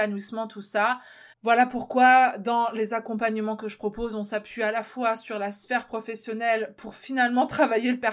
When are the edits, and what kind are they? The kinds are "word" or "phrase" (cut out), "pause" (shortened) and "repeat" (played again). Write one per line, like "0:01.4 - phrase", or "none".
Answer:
0:01.3 - pause